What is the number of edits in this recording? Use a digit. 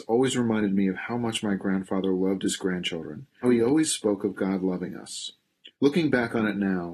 2